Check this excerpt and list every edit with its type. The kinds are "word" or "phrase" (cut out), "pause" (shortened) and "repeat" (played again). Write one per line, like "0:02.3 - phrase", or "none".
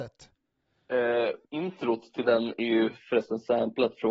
0:01.4 - pause